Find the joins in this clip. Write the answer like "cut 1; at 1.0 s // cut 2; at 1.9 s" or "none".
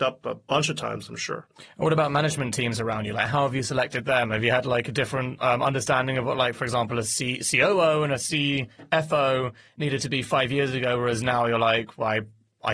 none